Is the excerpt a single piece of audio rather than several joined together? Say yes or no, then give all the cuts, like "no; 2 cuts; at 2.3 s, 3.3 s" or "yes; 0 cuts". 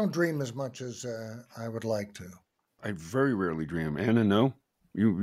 yes; 0 cuts